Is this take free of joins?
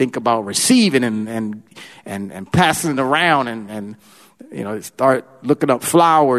yes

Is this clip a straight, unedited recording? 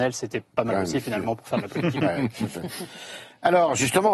yes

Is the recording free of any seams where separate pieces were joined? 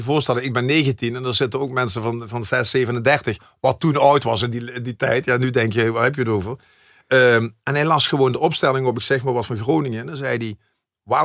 yes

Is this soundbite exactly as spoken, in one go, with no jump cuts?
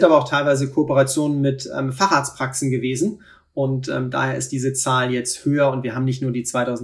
yes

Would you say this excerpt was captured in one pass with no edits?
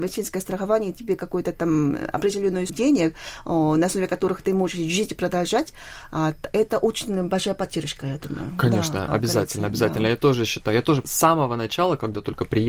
no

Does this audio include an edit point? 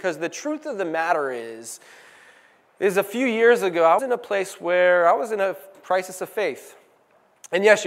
yes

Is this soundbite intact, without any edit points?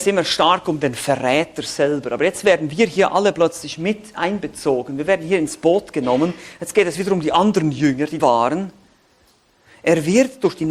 no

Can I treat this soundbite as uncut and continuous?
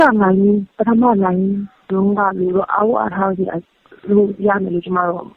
yes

